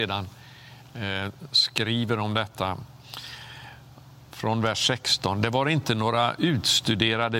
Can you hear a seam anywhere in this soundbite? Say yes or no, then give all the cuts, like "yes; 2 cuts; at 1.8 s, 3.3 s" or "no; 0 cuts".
no; 0 cuts